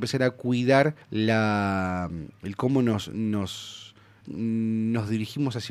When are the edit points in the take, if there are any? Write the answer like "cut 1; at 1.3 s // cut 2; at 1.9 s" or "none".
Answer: cut 1; at 1.0 s // cut 2; at 4.2 s